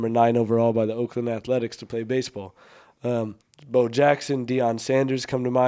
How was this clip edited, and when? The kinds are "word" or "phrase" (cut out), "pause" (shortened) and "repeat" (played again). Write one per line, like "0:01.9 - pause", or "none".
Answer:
0:03.4 - pause